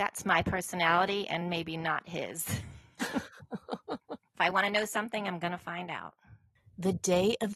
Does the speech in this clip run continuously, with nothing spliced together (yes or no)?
yes